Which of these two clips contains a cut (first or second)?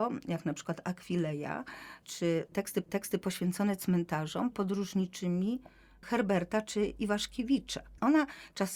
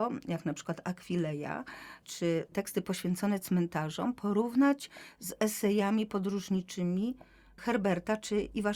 first